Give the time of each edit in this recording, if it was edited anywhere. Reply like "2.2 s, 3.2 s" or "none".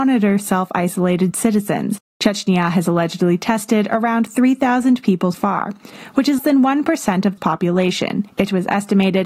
5.3 s, 6.4 s, 7.4 s